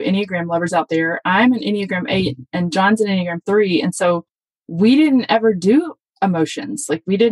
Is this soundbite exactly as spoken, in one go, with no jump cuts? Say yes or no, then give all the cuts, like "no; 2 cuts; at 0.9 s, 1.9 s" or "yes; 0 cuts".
yes; 0 cuts